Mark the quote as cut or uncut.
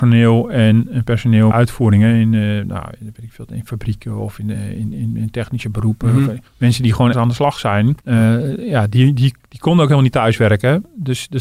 cut